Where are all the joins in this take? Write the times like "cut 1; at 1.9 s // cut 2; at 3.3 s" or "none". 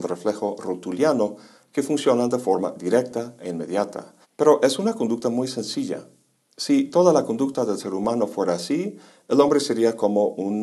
cut 1; at 4.2 s